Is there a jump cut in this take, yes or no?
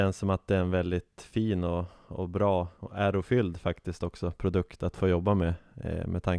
no